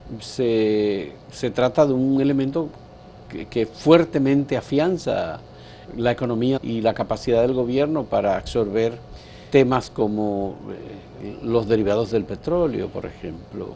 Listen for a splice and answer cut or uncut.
cut